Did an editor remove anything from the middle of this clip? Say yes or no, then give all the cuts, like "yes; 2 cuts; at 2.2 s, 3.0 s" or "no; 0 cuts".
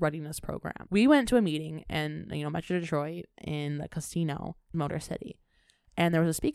yes; 1 cut; at 4.7 s